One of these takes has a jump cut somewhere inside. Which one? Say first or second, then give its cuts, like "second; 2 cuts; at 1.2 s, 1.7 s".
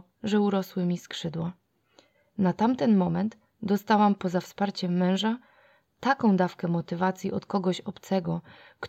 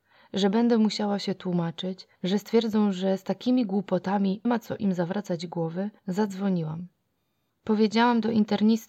second; 3 cuts; at 2.1 s, 4.4 s, 6.0 s